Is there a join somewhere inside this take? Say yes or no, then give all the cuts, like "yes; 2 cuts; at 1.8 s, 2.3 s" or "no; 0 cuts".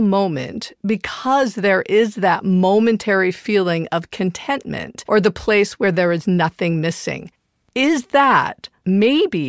no; 0 cuts